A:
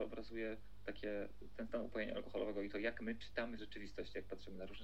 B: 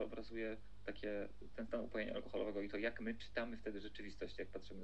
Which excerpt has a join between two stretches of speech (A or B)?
A